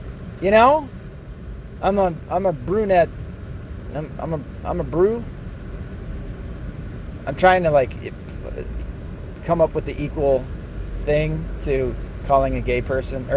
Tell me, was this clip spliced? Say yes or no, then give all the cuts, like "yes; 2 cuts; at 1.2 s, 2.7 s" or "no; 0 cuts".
no; 0 cuts